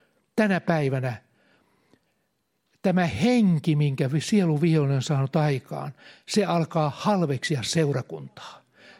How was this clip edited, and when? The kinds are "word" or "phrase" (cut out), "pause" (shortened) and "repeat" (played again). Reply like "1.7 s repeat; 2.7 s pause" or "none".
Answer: none